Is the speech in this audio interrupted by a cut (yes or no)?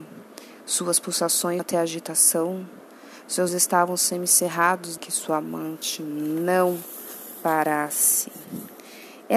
yes